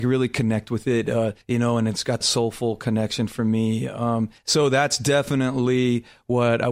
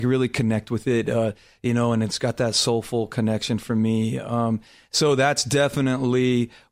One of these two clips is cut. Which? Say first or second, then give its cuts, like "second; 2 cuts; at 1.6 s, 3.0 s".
first; 3 cuts; at 1.4 s, 2.2 s, 4.4 s